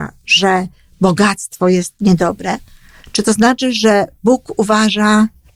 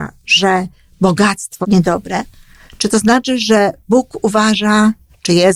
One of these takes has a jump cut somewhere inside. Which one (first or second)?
second